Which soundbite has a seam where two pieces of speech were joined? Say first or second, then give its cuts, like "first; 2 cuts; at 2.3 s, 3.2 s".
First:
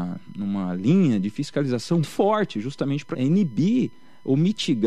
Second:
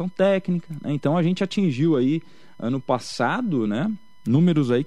first; 2 cuts; at 2.0 s, 3.1 s